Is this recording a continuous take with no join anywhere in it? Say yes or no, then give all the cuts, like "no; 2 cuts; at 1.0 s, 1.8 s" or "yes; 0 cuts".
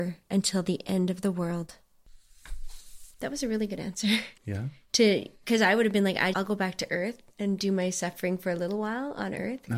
no; 4 cuts; at 3.1 s, 4.4 s, 6.3 s, 7.3 s